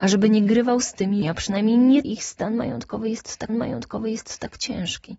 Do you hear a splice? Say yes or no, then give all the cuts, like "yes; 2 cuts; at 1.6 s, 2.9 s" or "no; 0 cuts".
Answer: yes; 3 cuts; at 1.2 s, 2.0 s, 3.5 s